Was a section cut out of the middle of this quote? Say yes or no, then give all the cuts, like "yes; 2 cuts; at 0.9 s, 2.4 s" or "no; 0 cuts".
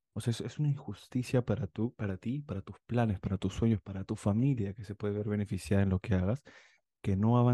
no; 0 cuts